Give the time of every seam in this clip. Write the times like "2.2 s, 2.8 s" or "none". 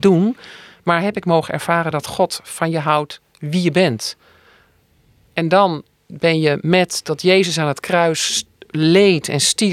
none